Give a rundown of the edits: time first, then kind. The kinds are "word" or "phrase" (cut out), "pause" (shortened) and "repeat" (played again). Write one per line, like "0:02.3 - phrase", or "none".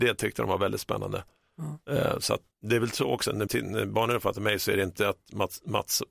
0:02.5 - word
0:03.5 - word